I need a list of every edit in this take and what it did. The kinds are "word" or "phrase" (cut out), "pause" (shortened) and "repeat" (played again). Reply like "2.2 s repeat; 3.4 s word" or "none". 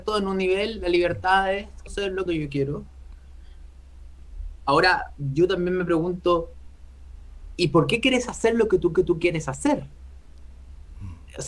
1.9 s phrase; 2.3 s phrase; 8.9 s repeat